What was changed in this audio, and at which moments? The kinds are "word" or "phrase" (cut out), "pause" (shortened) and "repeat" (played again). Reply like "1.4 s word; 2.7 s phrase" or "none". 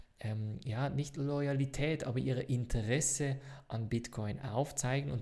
none